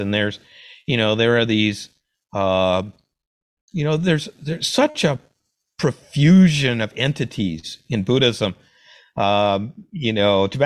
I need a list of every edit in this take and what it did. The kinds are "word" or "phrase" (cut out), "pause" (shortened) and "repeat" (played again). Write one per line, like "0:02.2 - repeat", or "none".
none